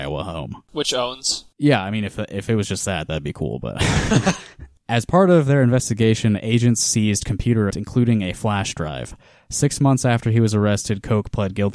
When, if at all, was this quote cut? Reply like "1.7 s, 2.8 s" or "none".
7.7 s